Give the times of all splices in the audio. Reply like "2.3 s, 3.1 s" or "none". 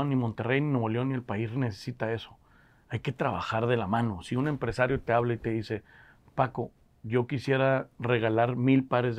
none